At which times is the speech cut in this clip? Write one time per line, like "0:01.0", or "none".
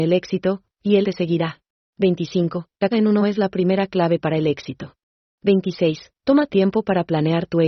0:01.0
0:01.8
0:02.9
0:03.2
0:05.2
0:06.5

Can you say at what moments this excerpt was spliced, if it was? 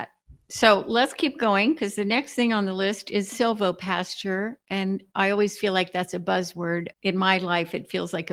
0:06.9

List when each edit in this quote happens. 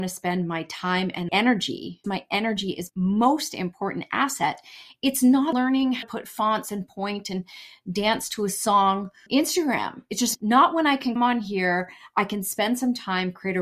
0:01.3
0:02.0
0:02.9
0:05.5
0:06.0
0:09.3
0:10.3
0:11.2

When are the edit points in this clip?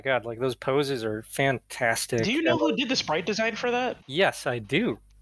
0:04.0

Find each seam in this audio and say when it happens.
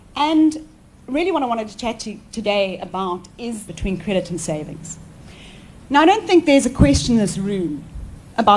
0:03.7

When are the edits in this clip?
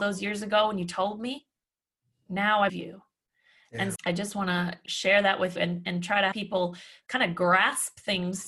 0:02.2
0:02.7
0:04.0
0:04.9
0:05.6
0:06.3

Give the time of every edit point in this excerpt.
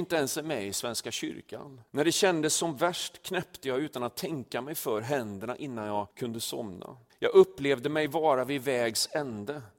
0:01.9
0:06.1
0:07.1

